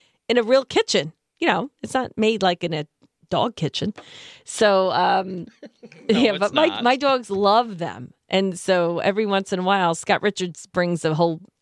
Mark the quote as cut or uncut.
uncut